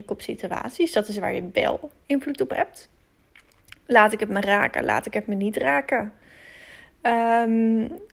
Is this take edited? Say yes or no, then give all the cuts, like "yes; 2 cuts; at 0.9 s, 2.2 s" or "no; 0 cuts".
no; 0 cuts